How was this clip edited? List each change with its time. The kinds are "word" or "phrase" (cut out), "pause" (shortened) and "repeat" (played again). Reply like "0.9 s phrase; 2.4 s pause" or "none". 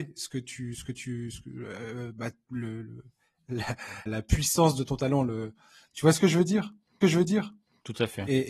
4.1 s word; 7.0 s repeat